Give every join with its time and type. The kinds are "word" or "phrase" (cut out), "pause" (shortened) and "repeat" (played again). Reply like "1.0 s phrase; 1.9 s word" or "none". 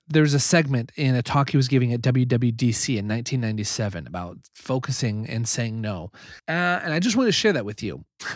6.4 s pause